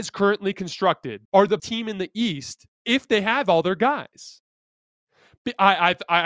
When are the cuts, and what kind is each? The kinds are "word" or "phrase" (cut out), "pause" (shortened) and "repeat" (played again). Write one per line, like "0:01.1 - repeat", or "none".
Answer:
0:01.2 - pause
0:01.6 - word
0:02.7 - pause